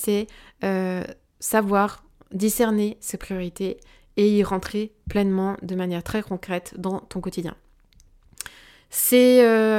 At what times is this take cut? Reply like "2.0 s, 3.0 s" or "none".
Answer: none